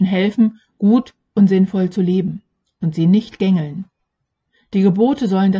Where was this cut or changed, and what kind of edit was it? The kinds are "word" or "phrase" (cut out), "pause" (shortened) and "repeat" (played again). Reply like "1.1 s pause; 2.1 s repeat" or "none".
none